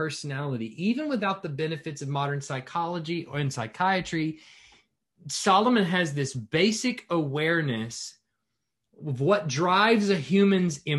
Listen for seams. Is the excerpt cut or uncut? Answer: uncut